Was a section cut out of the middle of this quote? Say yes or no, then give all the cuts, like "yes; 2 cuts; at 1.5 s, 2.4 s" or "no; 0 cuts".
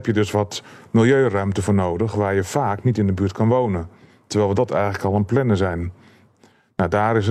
no; 0 cuts